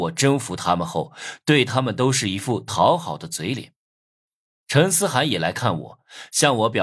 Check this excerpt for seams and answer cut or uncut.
uncut